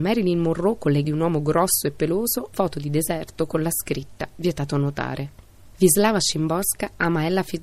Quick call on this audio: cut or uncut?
cut